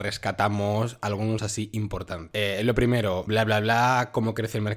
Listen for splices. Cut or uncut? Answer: cut